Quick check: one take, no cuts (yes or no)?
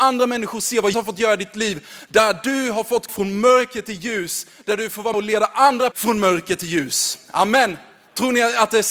no